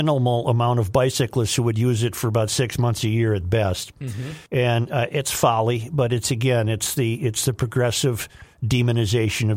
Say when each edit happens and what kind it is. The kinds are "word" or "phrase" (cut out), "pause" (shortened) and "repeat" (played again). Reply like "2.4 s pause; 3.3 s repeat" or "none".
4.5 s pause